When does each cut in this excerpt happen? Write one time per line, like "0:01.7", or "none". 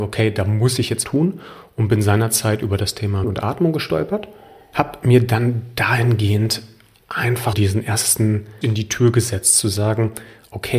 0:01.0
0:03.2
0:07.5
0:08.6